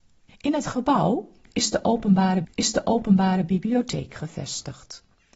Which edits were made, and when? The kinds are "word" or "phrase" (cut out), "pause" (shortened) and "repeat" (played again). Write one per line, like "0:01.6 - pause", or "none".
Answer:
0:02.4 - repeat